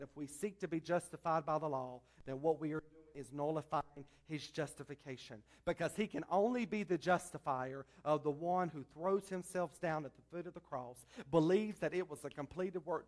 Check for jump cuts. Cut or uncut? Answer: uncut